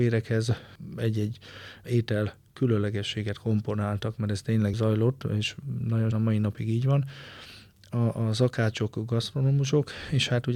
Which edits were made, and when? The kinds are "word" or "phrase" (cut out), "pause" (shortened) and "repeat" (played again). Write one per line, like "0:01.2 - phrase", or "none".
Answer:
0:04.7 - word
0:06.1 - phrase

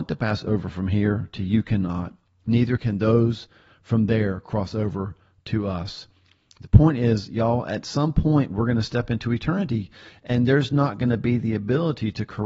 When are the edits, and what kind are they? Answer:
none

